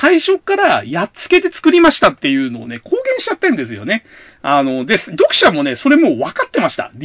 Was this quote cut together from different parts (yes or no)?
no